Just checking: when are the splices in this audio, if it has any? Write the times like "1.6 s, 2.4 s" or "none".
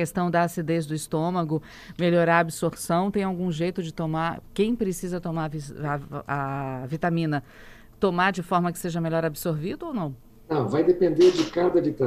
10.3 s